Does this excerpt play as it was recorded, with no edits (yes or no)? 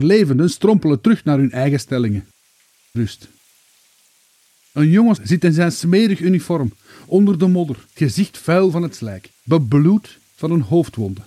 no